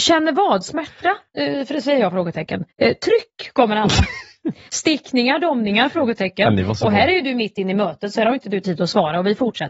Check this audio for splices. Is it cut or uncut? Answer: cut